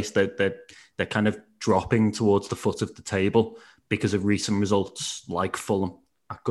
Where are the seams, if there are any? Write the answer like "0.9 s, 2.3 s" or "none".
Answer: none

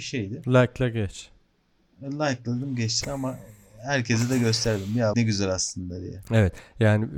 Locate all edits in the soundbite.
3.0 s, 5.1 s

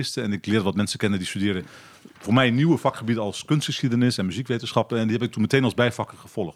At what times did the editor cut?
2.1 s

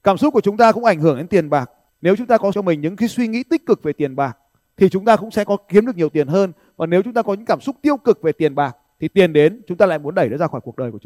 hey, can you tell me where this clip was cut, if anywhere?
2.5 s

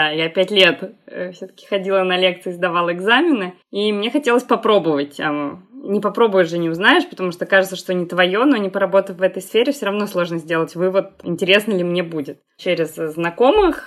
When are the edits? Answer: 3.6 s

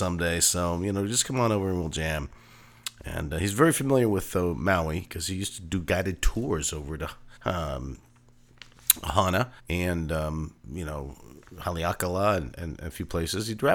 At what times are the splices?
7.4 s, 9.6 s

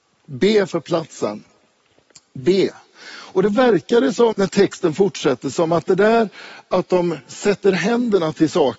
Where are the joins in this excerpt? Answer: 4.3 s

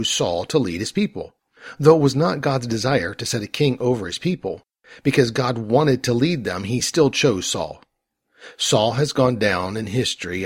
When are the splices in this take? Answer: none

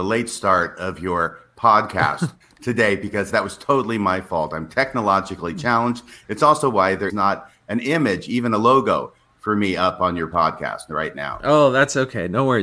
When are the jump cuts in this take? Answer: 7.1 s

